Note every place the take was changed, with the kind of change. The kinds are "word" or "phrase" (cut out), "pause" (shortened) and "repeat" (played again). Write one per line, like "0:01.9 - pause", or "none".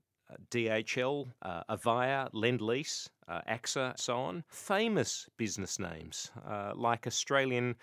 0:01.4 - pause
0:04.0 - word
0:04.5 - phrase